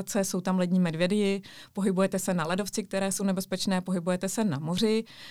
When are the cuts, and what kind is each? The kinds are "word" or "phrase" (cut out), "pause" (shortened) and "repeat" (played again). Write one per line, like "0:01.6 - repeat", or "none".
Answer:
none